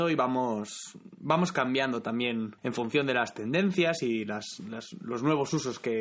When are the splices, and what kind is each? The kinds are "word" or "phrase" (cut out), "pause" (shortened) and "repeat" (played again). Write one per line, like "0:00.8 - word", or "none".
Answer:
0:02.6 - pause

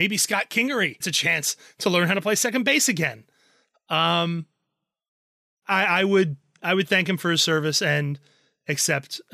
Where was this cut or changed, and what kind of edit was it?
0:01.0 - word
0:05.6 - word

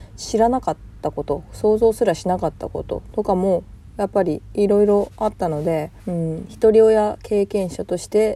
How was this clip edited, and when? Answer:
0:06.0 - pause

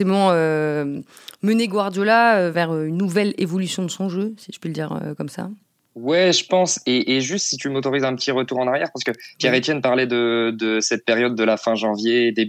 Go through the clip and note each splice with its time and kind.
none

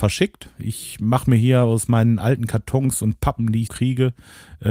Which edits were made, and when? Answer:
0:03.7 - word

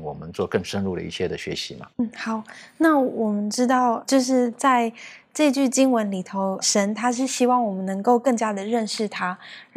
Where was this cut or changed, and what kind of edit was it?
0:01.9 - pause
0:04.0 - word
0:06.6 - word

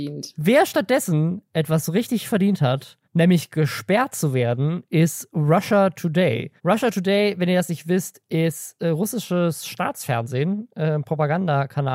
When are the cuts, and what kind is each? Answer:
0:03.0 - pause
0:06.6 - pause

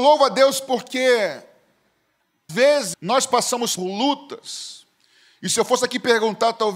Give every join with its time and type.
0:02.5 - word
0:02.9 - word
0:03.8 - word

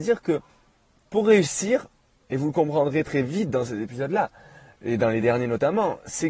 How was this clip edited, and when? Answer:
none

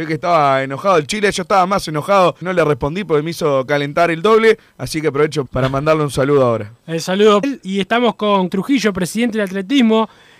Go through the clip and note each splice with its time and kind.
0:02.4 - word
0:05.5 - word
0:07.4 - word
0:08.5 - word

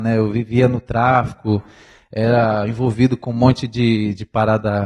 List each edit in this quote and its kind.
none

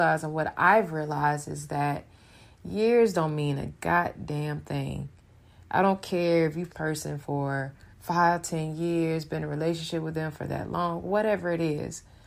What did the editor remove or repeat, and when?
0:06.7 - phrase
0:07.9 - pause

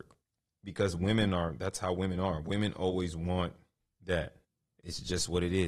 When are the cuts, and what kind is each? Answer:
none

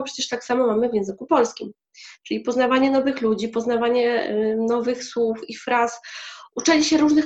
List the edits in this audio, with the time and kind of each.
none

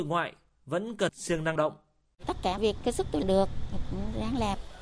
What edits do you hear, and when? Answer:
0:01.1 - word
0:01.6 - word
0:02.6 - word
0:03.2 - word
0:03.8 - word

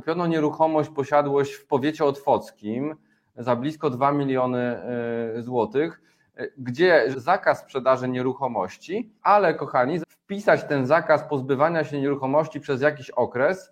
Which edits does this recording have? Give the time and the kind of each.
0:07.1 - phrase
0:09.2 - pause
0:10.0 - word

